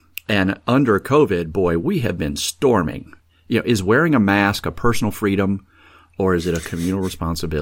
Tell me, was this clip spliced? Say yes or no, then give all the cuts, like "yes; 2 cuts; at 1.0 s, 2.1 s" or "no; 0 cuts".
no; 0 cuts